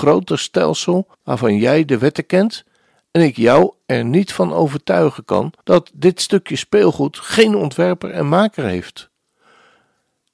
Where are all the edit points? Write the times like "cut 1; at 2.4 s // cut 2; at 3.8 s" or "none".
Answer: cut 1; at 1.1 s // cut 2; at 5.6 s